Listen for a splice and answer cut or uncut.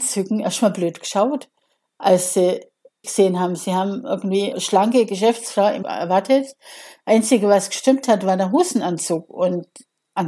cut